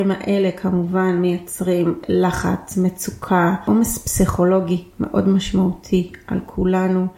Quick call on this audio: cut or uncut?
uncut